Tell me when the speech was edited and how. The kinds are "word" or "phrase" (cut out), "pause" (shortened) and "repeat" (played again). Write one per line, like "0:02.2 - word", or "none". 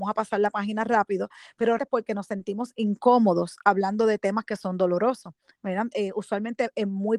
0:01.8 - word